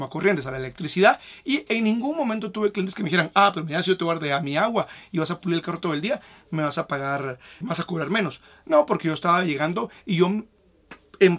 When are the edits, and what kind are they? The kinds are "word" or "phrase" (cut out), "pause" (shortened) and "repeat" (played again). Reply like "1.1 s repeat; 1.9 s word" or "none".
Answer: 7.6 s word